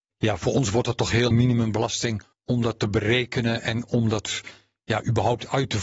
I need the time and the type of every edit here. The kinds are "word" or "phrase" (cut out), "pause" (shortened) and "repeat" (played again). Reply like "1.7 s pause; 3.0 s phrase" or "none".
1.3 s phrase; 2.3 s pause